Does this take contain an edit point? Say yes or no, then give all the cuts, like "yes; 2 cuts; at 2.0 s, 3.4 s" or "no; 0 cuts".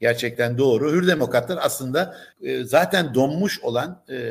no; 0 cuts